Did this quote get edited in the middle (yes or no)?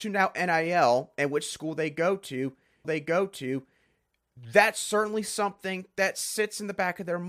yes